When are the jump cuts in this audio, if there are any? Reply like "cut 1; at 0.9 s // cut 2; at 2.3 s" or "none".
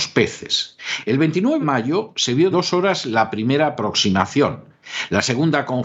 cut 1; at 1.6 s // cut 2; at 2.5 s